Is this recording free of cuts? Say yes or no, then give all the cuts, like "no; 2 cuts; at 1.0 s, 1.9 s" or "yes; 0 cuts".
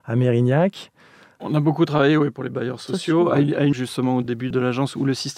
no; 1 cut; at 3.7 s